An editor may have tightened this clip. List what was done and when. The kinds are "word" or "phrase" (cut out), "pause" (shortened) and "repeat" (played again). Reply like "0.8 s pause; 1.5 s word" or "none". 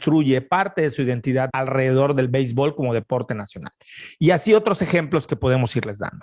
1.5 s word